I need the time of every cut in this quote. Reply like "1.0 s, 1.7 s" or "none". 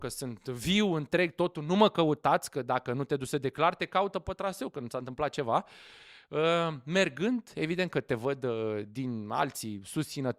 none